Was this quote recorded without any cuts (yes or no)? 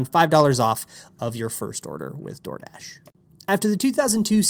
yes